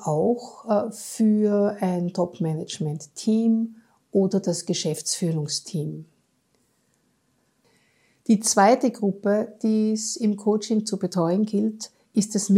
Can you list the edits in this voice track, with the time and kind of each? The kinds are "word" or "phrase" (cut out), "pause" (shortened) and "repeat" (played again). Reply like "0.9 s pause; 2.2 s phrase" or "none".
none